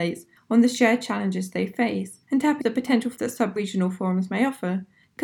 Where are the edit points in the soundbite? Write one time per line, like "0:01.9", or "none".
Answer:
0:02.2
0:02.6
0:03.2
0:03.6